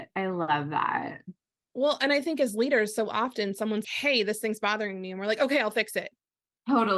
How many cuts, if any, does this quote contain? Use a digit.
1